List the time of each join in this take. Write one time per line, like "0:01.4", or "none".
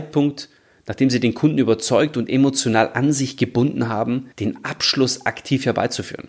0:04.3

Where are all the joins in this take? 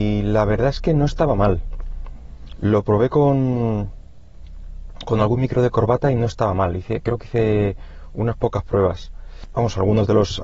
none

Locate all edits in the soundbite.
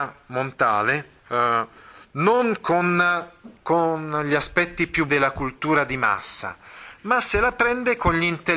0:01.2
0:03.6
0:05.1

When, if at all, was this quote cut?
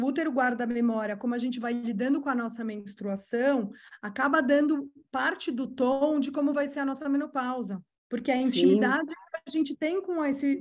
0:08.0

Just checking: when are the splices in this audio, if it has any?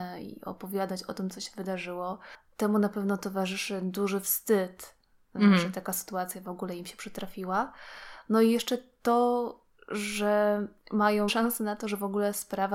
0:11.3

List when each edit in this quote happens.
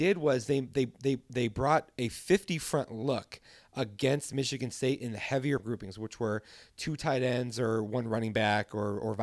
0:05.6

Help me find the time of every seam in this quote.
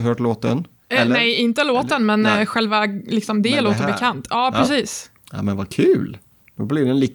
none

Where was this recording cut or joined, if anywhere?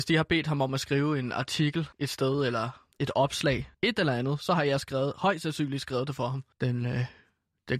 0:01.9
0:02.9
0:03.7
0:06.5

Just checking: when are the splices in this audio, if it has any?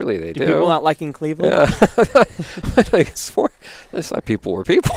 0:01.0

